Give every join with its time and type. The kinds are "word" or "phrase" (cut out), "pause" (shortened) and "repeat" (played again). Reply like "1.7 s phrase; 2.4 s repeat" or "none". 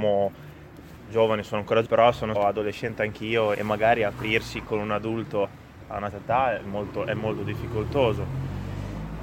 1.8 s word; 2.3 s word; 3.5 s word; 4.6 s word; 5.4 s word; 6.1 s word